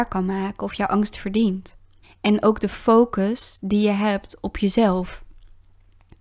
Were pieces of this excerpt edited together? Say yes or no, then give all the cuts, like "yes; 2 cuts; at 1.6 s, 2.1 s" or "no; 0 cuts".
yes; 2 cuts; at 1.1 s, 2.0 s